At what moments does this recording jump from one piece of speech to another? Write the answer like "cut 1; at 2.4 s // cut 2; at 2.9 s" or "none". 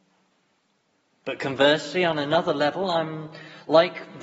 none